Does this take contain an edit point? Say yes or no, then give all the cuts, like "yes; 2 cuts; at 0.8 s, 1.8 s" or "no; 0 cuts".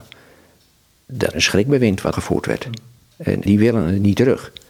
yes; 3 cuts; at 1.3 s, 2.1 s, 3.5 s